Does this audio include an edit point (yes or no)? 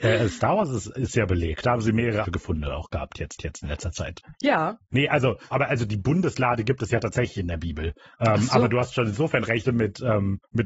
yes